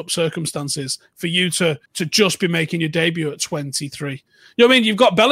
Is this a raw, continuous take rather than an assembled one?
no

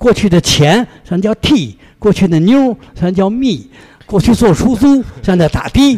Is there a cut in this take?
no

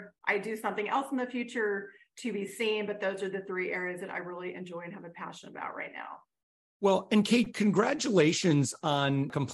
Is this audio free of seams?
yes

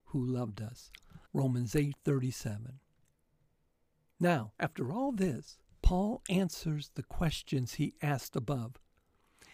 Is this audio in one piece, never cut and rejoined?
no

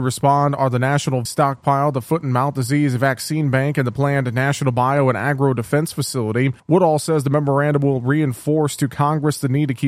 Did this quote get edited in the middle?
yes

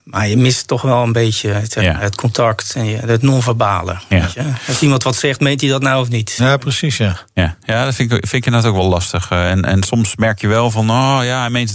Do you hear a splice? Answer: no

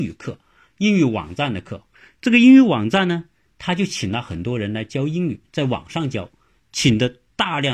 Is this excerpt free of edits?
yes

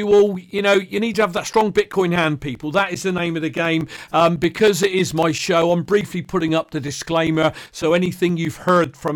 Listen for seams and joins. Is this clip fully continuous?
yes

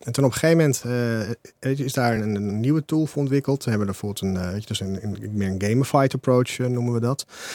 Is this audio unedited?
yes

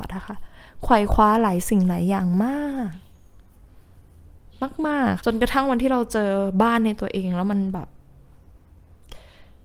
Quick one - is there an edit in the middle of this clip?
yes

